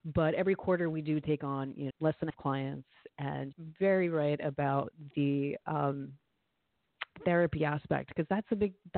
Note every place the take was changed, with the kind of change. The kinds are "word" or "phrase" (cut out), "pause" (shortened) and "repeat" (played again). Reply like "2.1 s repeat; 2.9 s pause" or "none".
1.9 s phrase; 2.3 s phrase; 3.5 s word